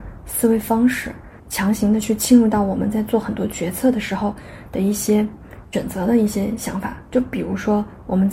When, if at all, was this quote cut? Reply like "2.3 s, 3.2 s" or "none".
1.4 s